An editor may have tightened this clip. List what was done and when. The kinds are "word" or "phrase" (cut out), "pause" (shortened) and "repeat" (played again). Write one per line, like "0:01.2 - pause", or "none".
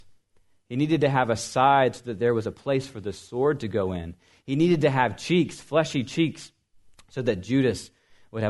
none

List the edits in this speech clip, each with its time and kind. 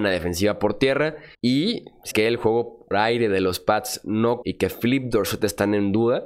0:01.3 - pause
0:02.1 - phrase
0:02.9 - word
0:04.4 - phrase

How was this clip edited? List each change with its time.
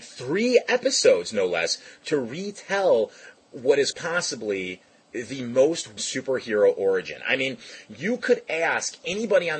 0:03.9 - word
0:06.0 - word

